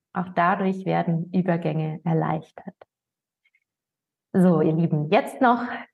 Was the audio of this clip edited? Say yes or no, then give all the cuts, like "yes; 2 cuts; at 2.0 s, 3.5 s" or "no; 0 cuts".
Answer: no; 0 cuts